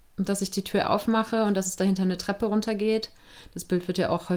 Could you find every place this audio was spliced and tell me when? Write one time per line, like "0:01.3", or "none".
none